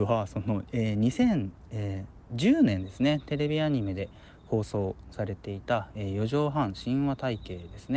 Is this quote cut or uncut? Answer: uncut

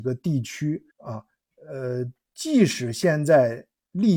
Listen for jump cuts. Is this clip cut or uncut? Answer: cut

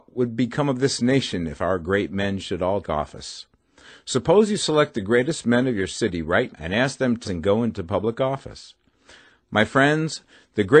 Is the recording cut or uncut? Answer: cut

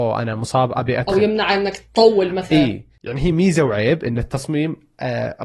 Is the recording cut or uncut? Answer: uncut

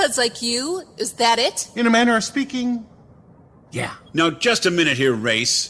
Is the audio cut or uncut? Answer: uncut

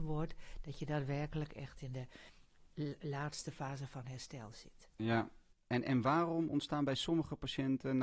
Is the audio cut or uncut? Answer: uncut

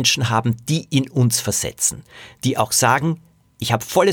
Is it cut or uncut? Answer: uncut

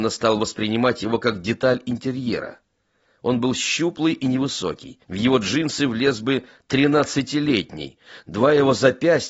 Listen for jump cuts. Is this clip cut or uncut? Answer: cut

